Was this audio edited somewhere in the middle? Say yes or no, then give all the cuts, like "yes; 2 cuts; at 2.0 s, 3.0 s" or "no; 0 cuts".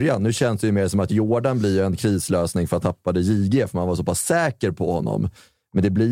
yes; 1 cut; at 2.8 s